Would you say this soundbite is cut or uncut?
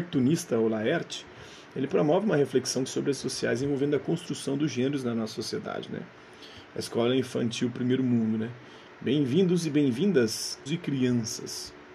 cut